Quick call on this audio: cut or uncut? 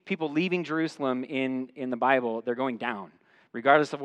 uncut